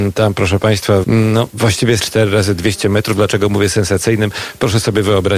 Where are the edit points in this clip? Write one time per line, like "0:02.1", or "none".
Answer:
0:01.0
0:02.0